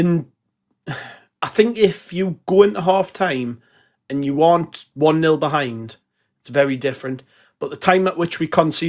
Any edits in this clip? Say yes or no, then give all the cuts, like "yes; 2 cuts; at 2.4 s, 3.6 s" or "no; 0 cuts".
no; 0 cuts